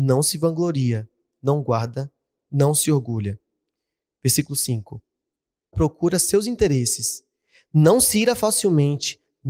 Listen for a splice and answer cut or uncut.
cut